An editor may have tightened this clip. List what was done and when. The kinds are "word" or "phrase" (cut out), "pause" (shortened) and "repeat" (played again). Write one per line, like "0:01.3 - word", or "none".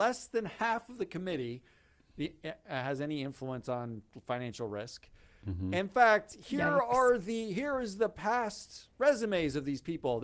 none